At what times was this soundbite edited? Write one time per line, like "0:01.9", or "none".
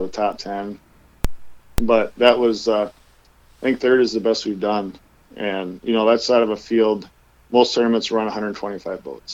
none